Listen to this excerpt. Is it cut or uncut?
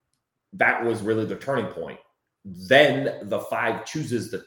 uncut